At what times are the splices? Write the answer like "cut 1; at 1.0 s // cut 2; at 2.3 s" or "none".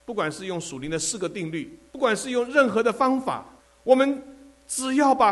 cut 1; at 1.9 s // cut 2; at 3.6 s